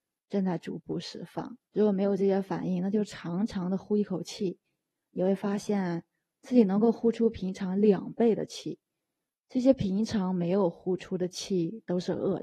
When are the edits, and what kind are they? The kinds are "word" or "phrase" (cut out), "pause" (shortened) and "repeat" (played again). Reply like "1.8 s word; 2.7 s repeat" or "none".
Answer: 1.6 s pause

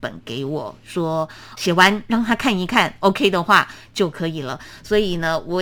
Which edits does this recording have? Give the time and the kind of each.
1.6 s word

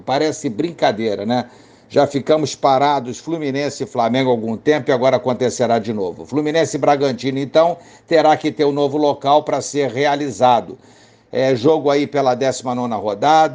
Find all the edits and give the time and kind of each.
none

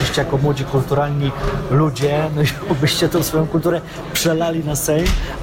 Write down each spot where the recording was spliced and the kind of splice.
none

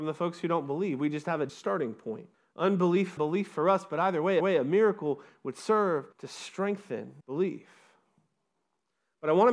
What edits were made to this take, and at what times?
1.5 s word; 2.3 s pause; 3.2 s word; 4.4 s repeat; 6.1 s pause; 7.2 s pause

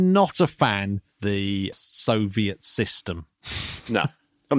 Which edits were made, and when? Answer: 1.2 s word; 1.7 s word

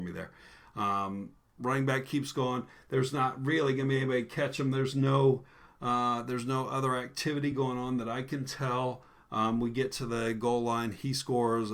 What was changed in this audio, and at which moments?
none

